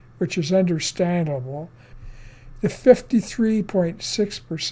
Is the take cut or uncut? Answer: uncut